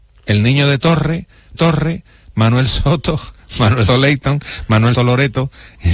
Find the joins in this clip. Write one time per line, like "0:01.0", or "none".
0:01.5
0:03.9
0:05.0